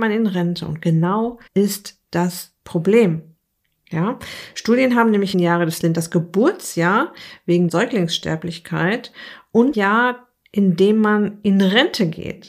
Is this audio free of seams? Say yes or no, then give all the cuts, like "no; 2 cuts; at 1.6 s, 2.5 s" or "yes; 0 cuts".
no; 5 cuts; at 1.5 s, 5.3 s, 5.8 s, 7.7 s, 9.7 s